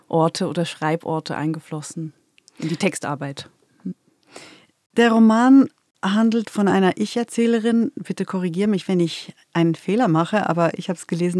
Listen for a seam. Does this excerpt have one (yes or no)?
no